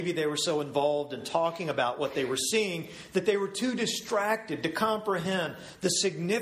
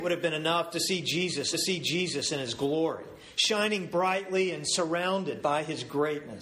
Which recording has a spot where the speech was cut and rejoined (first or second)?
second